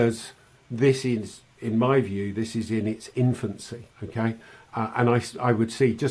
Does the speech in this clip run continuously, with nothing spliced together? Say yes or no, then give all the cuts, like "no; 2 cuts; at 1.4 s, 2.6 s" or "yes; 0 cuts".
no; 1 cut; at 3.9 s